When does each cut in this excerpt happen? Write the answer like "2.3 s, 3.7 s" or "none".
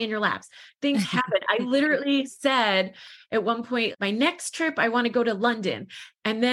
none